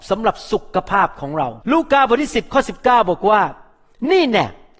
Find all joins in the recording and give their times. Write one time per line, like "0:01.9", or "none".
0:01.6